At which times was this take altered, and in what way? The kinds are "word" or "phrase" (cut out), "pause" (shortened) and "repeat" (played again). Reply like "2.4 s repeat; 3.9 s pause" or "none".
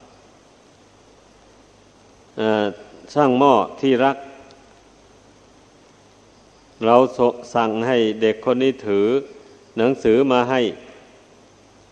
none